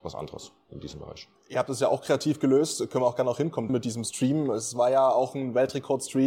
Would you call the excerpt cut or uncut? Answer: cut